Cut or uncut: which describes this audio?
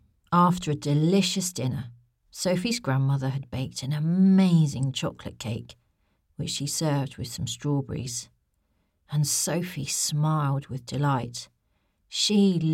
uncut